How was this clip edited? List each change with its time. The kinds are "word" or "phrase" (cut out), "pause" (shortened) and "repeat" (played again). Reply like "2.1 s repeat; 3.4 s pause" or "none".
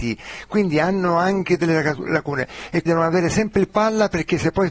2.9 s word; 3.7 s word